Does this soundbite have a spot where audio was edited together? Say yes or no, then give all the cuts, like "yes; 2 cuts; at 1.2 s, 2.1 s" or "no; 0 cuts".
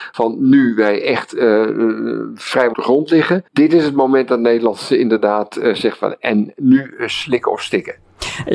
yes; 2 cuts; at 2.7 s, 3.5 s